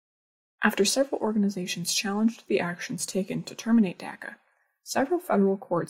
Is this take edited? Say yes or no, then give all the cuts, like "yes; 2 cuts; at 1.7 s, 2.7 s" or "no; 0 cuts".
no; 0 cuts